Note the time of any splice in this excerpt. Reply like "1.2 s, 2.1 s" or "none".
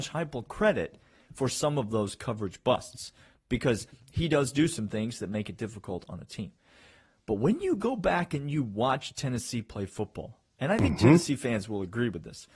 none